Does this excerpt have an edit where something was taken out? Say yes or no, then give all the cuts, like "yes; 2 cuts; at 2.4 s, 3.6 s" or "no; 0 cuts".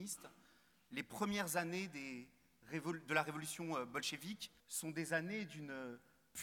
yes; 1 cut; at 4.6 s